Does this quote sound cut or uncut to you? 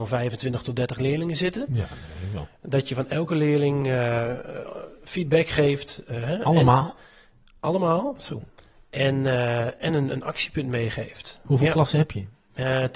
uncut